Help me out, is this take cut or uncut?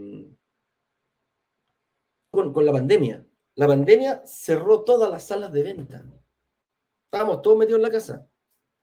cut